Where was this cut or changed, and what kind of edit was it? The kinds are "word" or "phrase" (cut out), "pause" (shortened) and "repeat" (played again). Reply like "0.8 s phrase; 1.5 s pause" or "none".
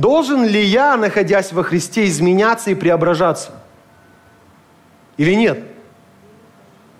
none